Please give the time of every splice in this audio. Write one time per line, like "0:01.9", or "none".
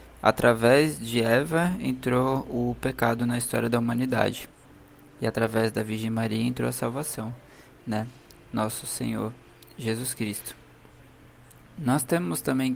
none